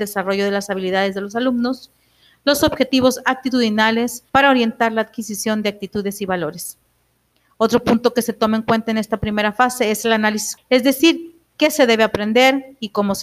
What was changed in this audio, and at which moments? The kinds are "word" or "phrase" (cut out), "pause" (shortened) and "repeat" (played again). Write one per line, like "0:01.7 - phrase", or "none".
0:04.3 - pause
0:10.6 - word